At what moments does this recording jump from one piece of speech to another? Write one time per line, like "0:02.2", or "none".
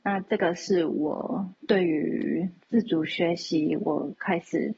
0:01.6
0:02.6